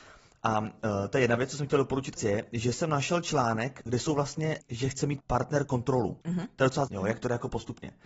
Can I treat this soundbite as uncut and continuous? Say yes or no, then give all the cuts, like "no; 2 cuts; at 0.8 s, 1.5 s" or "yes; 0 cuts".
no; 6 cuts; at 2.2 s, 3.9 s, 4.6 s, 5.2 s, 6.2 s, 6.9 s